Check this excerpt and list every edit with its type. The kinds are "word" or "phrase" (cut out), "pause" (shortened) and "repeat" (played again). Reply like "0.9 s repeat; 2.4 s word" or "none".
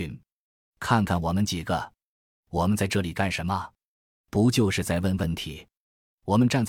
none